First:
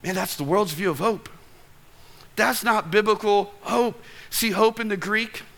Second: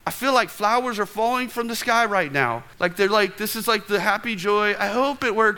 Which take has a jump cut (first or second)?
second